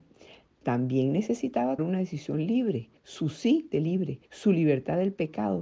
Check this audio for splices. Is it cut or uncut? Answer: cut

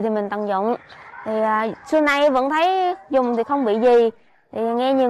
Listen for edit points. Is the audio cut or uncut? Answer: uncut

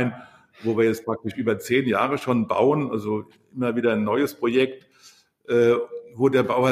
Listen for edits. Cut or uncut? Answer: uncut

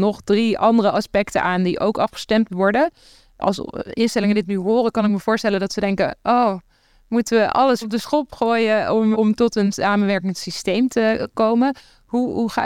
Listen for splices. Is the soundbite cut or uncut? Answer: cut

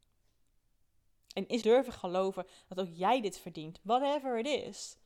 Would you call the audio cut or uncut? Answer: cut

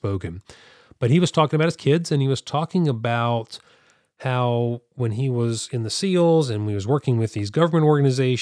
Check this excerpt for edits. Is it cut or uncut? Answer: uncut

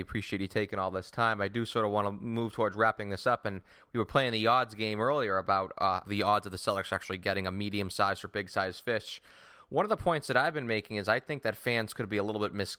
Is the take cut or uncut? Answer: cut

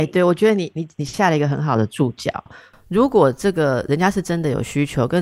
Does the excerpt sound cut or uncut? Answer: cut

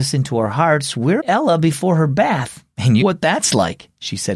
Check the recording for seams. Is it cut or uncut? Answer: cut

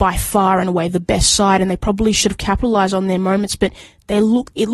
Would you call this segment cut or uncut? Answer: uncut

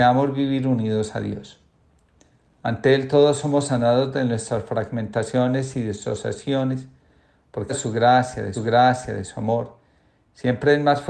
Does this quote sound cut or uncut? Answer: cut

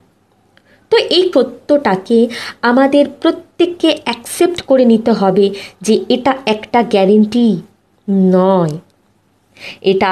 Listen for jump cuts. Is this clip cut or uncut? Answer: cut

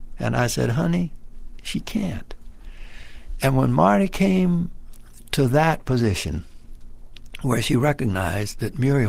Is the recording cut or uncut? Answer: uncut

